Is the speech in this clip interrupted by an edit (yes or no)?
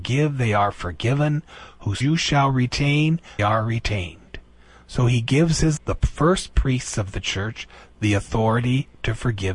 yes